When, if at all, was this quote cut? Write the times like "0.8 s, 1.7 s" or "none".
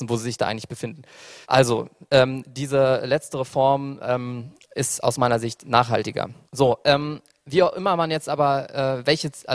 1.4 s, 6.4 s